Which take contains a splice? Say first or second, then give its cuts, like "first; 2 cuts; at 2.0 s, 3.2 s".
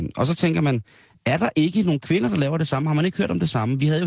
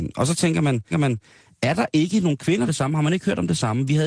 second; 2 cuts; at 0.9 s, 2.7 s